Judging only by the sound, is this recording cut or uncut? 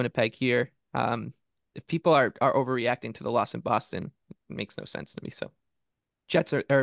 uncut